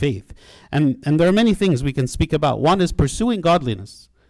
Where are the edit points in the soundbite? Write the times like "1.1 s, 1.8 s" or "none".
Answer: none